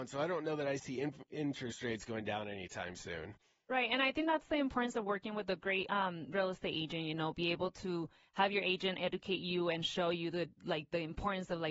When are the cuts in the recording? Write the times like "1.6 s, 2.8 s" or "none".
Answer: none